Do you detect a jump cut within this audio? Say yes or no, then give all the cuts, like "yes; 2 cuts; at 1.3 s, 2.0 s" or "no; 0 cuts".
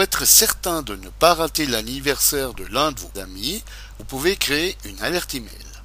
yes; 1 cut; at 3.2 s